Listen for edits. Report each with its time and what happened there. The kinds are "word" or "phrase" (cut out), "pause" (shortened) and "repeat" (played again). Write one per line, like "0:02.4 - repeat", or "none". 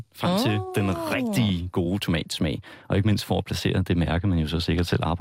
none